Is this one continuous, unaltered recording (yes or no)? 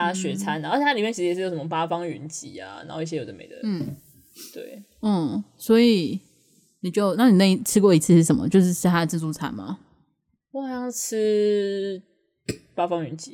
yes